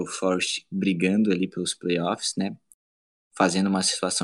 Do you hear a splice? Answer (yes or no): no